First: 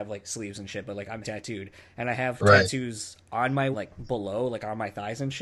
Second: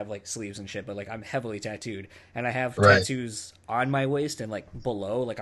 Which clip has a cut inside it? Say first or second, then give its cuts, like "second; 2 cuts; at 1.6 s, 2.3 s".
first; 2 cuts; at 1.2 s, 3.7 s